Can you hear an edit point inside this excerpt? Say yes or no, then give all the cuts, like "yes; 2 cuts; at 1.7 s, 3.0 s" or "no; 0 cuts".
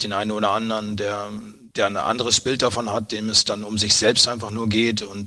yes; 1 cut; at 1.7 s